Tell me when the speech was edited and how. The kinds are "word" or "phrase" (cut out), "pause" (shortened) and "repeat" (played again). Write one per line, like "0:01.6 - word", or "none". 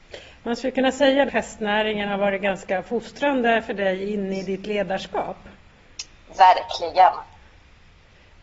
0:01.3 - word